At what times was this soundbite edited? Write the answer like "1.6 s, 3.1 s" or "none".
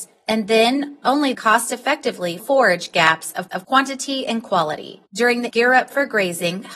1.0 s, 1.3 s, 2.4 s, 3.5 s, 5.1 s, 5.5 s